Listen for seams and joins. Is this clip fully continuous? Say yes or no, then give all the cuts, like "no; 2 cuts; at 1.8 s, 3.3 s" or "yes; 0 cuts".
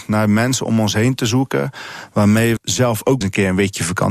no; 2 cuts; at 2.6 s, 3.2 s